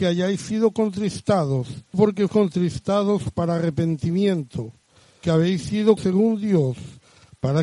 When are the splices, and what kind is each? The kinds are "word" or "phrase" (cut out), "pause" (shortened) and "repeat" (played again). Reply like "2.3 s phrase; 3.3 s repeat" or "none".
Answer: 1.9 s word; 2.3 s word; 5.2 s word; 6.0 s word